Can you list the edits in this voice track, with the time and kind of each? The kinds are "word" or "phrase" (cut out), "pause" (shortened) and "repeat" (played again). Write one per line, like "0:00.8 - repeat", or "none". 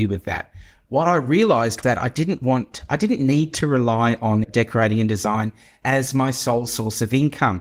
0:01.8 - word
0:04.4 - word